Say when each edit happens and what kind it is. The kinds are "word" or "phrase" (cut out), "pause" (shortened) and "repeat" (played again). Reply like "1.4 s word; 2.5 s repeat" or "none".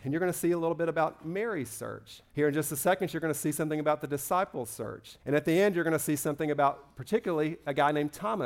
2.3 s pause; 5.2 s pause